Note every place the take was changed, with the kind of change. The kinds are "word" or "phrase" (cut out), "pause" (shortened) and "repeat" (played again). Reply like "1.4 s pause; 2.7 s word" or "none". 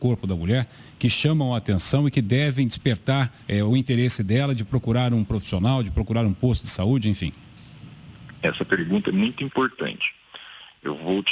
3.4 s pause